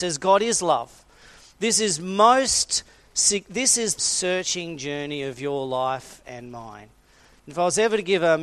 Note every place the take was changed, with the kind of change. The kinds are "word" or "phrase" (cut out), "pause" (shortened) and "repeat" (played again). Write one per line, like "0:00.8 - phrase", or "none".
0:04.0 - phrase

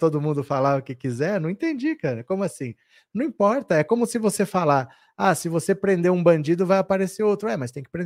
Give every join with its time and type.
none

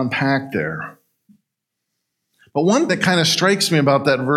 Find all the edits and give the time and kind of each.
0:02.9 - word

